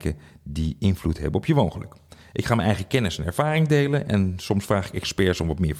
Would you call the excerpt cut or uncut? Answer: uncut